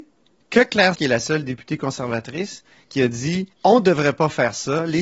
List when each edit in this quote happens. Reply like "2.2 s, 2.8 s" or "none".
0.9 s, 2.7 s, 3.5 s